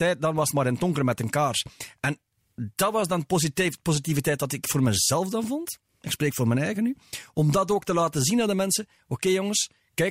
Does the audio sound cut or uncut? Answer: uncut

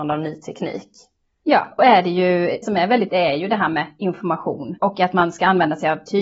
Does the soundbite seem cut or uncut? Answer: cut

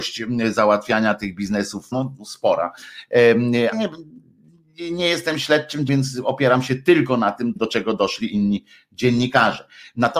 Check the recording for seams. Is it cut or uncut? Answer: cut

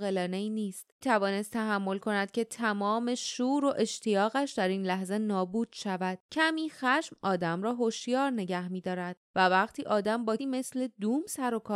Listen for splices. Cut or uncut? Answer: cut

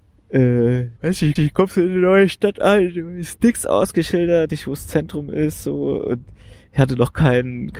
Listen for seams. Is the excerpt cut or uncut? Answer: cut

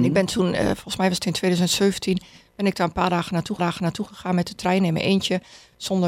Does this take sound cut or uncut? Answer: cut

